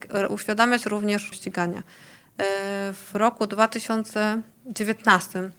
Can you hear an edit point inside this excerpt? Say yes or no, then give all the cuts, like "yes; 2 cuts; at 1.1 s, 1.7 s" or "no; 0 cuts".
yes; 1 cut; at 1.3 s